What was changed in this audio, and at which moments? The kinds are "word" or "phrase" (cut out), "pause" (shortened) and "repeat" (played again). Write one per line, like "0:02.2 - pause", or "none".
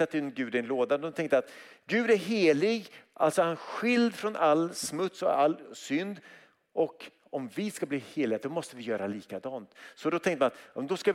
none